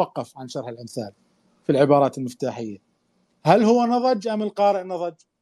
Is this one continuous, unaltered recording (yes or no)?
yes